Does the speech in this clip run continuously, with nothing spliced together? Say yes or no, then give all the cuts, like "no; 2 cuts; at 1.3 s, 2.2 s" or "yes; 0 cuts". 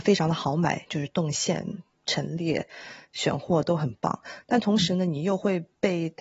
yes; 0 cuts